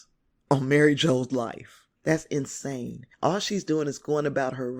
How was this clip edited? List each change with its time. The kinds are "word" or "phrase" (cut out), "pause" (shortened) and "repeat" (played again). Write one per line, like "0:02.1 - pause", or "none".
0:01.9 - pause
0:03.1 - pause